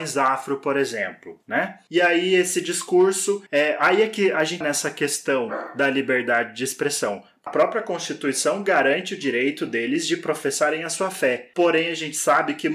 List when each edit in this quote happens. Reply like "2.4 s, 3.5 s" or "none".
3.5 s, 4.6 s, 7.5 s